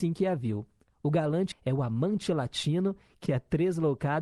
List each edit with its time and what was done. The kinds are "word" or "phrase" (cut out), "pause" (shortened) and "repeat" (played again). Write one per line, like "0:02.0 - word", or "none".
0:01.5 - word
0:03.3 - word